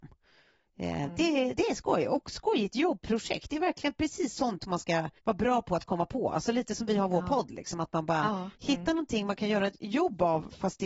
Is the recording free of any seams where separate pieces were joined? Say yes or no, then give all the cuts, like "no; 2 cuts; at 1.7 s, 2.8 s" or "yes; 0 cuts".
no; 3 cuts; at 1.5 s, 5.2 s, 8.5 s